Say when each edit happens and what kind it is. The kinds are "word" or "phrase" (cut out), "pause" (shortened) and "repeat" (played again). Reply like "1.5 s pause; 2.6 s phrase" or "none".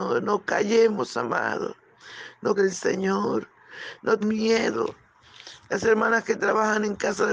2.6 s phrase; 4.2 s word